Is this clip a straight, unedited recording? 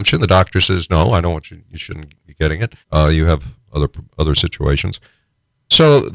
no; 1 cut; at 2.8 s

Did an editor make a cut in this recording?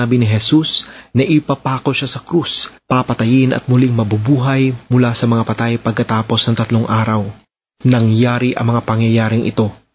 no; 0 cuts

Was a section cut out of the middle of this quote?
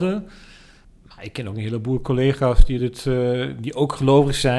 no; 0 cuts

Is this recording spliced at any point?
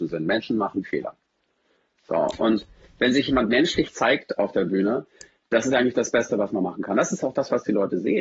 no; 0 cuts

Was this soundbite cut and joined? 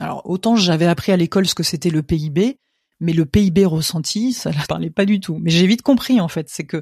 yes; 1 cut; at 4.6 s

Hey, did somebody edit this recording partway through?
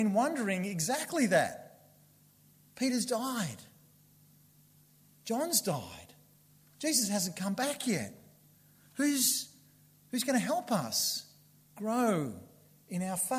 no; 0 cuts

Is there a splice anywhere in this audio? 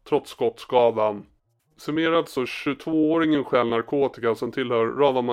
no; 0 cuts

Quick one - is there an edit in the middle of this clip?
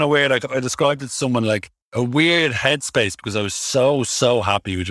yes; 1 cut; at 1.8 s

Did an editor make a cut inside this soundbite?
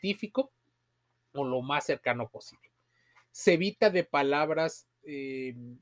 no; 0 cuts

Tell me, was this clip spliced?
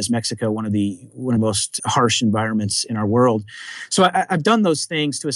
yes; 2 cuts; at 1.4 s, 1.8 s

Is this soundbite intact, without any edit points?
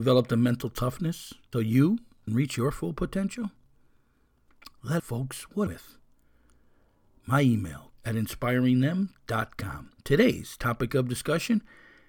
no; 6 cuts; at 1.5 s, 2.3 s, 5.0 s, 5.7 s, 7.9 s, 10.0 s

